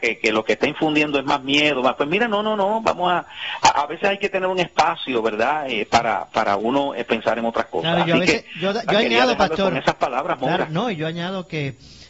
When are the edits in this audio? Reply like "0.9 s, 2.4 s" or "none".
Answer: none